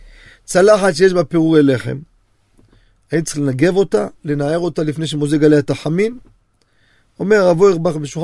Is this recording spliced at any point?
no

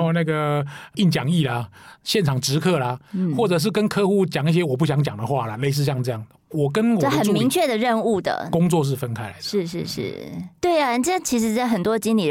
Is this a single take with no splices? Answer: yes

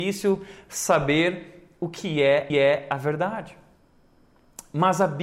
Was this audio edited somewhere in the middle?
yes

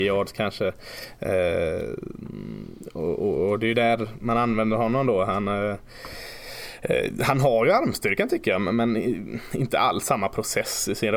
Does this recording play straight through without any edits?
yes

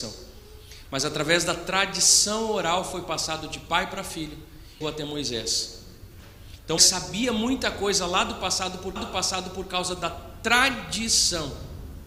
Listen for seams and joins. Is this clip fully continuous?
no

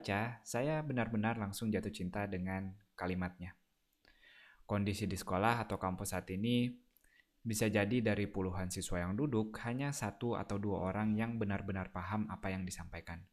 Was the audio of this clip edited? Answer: no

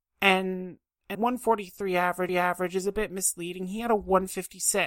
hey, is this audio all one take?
no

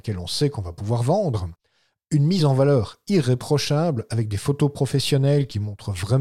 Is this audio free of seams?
yes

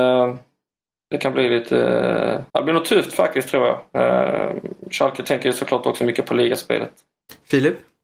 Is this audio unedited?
no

